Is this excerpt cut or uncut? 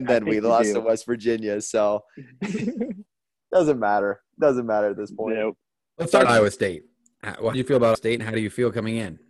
cut